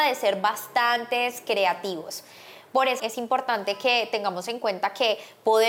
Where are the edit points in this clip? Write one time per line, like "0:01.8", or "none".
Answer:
0:03.0